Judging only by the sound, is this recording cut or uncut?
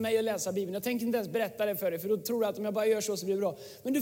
uncut